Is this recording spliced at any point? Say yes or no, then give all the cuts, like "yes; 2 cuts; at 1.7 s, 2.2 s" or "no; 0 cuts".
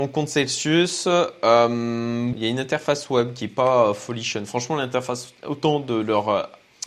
yes; 2 cuts; at 2.3 s, 5.4 s